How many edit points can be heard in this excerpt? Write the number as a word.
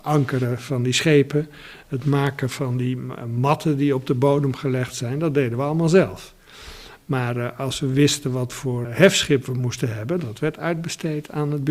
one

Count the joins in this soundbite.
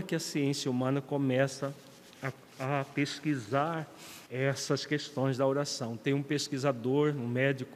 one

